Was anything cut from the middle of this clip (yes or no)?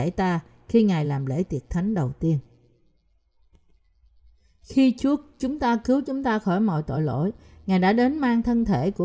no